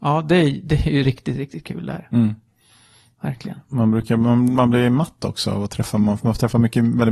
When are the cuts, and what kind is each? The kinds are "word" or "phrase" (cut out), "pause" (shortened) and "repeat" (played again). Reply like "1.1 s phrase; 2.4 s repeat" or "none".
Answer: none